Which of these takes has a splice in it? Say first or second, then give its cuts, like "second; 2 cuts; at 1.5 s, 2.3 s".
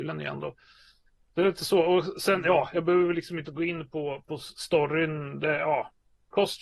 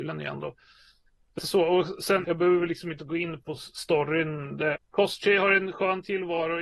second; 4 cuts; at 1.4 s, 2.2 s, 3.4 s, 4.8 s